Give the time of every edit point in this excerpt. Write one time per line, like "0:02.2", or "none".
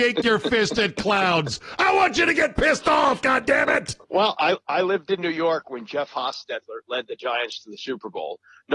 0:04.0